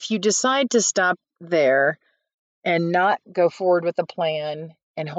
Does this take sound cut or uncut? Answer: uncut